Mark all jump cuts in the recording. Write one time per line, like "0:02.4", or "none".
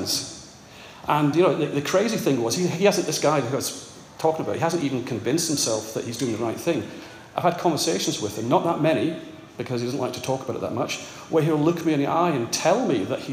none